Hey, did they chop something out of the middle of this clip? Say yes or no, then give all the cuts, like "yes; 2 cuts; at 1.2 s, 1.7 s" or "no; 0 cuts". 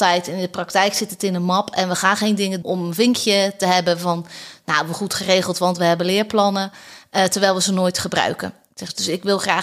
yes; 1 cut; at 2.6 s